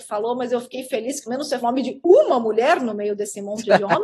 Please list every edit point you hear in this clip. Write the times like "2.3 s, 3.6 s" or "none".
1.3 s, 1.6 s